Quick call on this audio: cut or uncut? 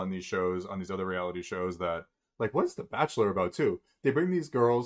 uncut